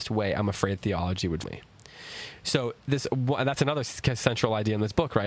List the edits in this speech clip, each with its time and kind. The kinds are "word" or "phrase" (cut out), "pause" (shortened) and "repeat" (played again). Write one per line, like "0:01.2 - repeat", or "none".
0:01.4 - word
0:02.8 - pause